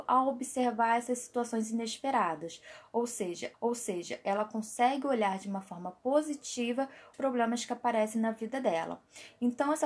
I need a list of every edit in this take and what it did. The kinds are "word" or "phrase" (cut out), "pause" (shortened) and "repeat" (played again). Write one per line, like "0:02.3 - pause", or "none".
0:03.5 - repeat
0:07.1 - word